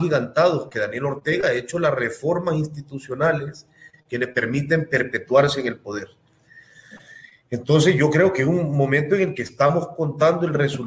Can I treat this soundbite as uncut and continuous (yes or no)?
yes